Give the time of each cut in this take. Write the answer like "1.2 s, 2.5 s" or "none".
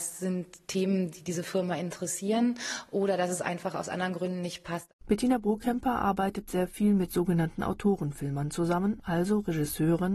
none